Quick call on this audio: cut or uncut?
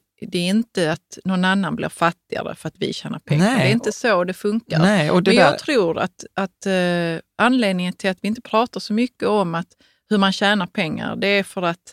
uncut